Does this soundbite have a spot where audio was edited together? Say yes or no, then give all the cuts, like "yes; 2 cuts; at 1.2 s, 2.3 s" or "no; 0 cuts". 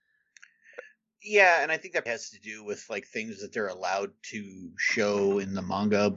yes; 1 cut; at 2.1 s